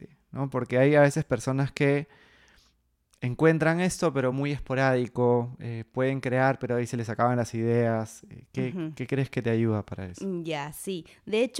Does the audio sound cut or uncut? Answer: uncut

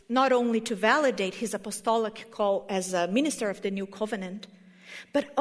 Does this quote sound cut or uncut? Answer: uncut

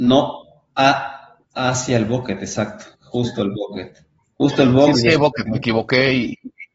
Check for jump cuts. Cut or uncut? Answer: cut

